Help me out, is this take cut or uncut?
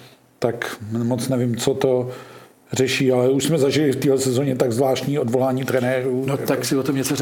uncut